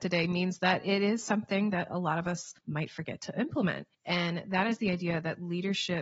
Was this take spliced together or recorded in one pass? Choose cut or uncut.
cut